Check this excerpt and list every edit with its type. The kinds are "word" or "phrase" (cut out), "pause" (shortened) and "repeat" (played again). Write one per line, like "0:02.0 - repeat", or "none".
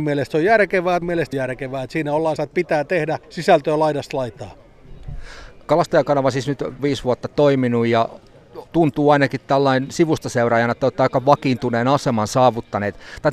0:01.0 - word
0:01.3 - phrase
0:02.4 - phrase
0:03.2 - pause
0:05.6 - pause
0:06.8 - word
0:08.7 - pause